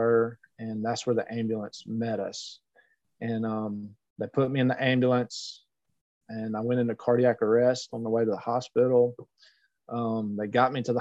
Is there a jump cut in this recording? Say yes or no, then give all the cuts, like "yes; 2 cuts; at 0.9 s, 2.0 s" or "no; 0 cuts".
no; 0 cuts